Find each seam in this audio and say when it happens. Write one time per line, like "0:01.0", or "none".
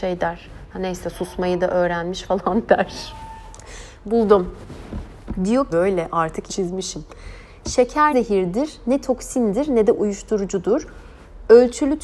0:05.7
0:06.5
0:08.1